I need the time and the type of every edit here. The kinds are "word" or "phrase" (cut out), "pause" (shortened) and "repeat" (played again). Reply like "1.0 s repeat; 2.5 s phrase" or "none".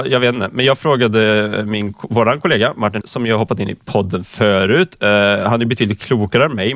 3.0 s word